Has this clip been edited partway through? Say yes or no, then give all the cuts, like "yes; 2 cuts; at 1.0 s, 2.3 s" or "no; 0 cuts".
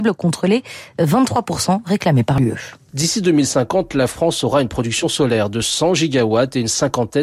no; 0 cuts